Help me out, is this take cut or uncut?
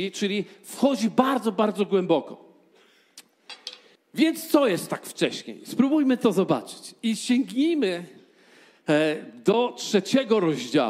cut